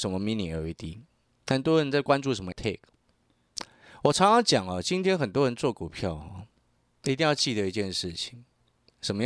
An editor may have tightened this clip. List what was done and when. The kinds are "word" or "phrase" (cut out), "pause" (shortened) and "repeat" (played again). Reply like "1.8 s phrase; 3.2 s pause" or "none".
2.5 s word